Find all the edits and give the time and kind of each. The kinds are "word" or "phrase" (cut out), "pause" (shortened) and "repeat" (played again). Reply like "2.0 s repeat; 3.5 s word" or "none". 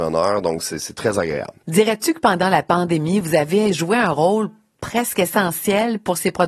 none